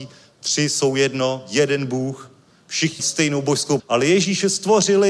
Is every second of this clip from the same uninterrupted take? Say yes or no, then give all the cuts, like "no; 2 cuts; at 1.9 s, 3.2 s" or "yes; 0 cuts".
no; 2 cuts; at 3.0 s, 3.8 s